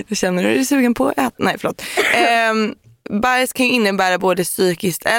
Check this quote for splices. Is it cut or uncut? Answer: uncut